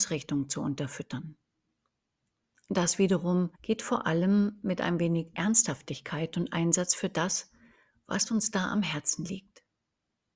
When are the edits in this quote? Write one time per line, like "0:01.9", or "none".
0:03.5